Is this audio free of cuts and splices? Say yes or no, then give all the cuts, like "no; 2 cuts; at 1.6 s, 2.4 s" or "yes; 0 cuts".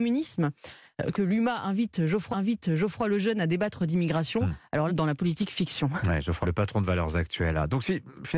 no; 4 cuts; at 1.1 s, 2.3 s, 4.9 s, 6.4 s